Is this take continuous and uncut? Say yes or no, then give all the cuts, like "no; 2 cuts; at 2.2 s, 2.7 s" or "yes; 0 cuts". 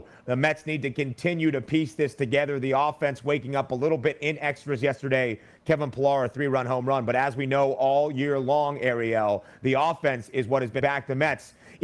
no; 1 cut; at 10.8 s